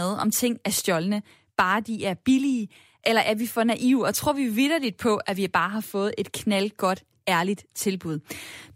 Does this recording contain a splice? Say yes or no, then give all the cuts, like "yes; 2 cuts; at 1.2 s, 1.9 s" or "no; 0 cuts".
no; 0 cuts